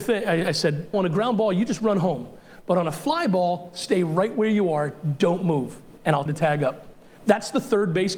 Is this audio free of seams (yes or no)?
no